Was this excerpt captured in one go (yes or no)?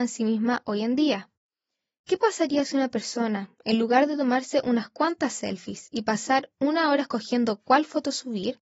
yes